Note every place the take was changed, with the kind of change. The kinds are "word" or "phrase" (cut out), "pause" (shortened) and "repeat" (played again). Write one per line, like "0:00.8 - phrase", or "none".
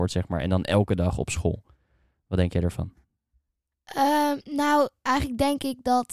none